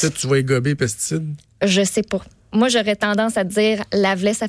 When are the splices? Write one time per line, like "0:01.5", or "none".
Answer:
none